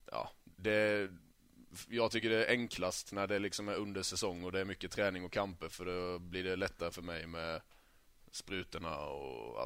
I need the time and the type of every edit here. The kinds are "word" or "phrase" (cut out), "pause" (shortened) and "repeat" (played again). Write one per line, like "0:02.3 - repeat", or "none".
none